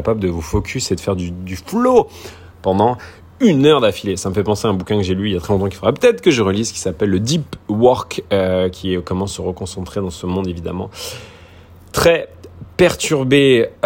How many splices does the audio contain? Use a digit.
0